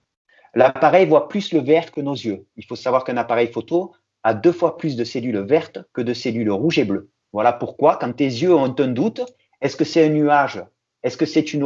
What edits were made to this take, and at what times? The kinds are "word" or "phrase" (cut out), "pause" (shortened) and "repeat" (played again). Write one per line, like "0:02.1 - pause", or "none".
none